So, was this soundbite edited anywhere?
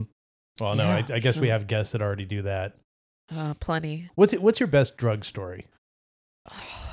no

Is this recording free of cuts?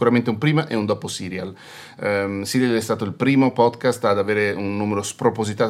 yes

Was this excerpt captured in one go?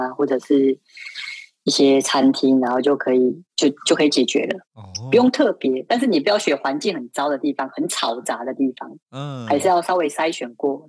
yes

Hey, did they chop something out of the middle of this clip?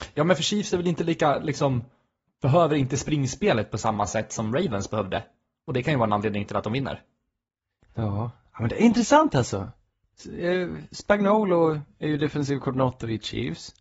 yes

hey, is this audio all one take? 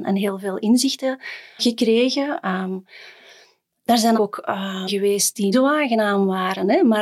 no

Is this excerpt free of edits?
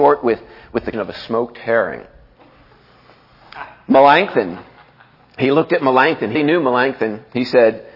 no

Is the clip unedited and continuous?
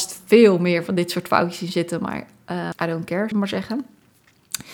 no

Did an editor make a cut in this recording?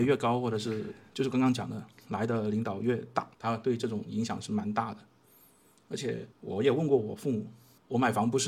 yes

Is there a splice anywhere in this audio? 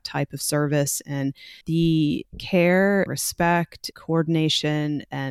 yes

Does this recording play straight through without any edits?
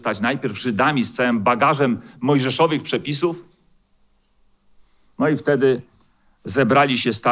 yes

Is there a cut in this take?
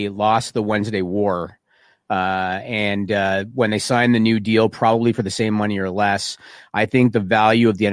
no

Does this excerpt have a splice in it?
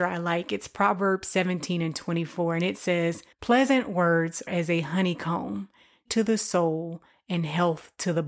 yes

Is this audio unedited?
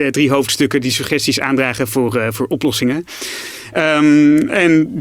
yes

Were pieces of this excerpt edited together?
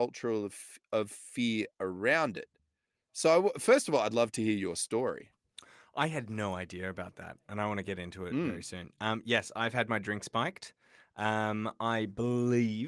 no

